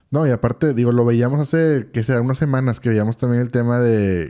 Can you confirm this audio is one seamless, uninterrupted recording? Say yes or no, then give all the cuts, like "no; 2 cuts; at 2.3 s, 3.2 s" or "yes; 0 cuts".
yes; 0 cuts